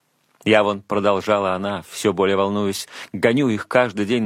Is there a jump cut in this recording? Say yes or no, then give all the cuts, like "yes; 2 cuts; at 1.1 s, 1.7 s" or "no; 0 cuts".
no; 0 cuts